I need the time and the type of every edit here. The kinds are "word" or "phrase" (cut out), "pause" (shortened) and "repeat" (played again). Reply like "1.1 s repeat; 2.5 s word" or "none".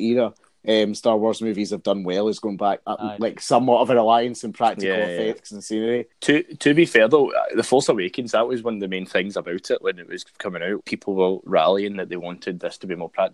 2.8 s word; 6.1 s pause; 10.8 s word